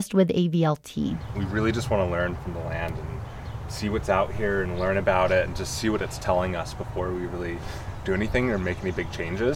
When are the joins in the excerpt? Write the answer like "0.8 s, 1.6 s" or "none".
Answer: none